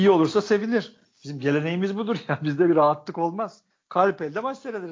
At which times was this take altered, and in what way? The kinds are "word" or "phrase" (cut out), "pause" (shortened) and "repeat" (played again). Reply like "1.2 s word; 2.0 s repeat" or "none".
none